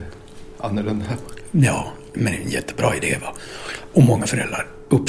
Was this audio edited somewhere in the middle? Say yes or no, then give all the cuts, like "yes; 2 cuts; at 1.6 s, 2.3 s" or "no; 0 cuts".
yes; 1 cut; at 2.1 s